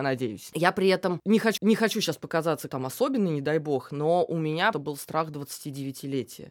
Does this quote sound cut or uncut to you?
cut